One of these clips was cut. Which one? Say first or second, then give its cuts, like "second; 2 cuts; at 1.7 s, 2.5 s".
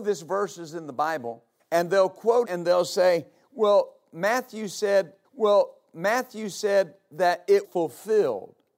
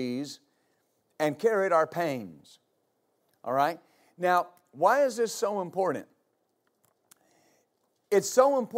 first; 4 cuts; at 1.6 s, 2.4 s, 5.2 s, 7.6 s